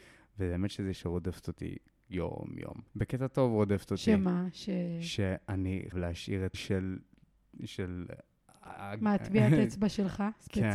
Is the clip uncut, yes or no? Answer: no